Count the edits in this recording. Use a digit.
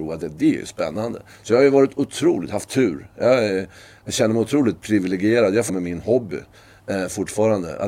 1